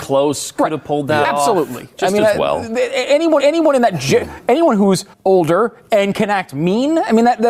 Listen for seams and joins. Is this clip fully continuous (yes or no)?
no